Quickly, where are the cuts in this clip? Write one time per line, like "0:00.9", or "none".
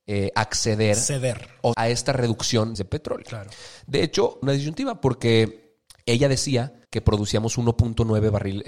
0:01.7
0:02.8
0:04.4
0:05.9
0:06.8